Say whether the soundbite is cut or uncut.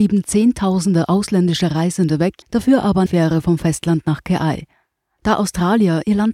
cut